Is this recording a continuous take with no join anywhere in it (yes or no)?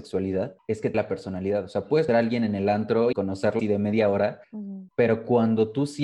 no